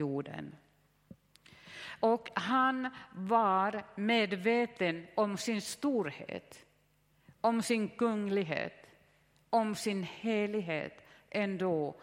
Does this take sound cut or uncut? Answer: uncut